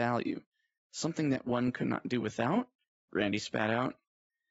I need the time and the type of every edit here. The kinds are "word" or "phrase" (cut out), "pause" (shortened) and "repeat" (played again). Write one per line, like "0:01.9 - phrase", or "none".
0:02.8 - pause